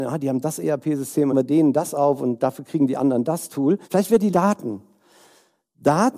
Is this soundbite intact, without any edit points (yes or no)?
no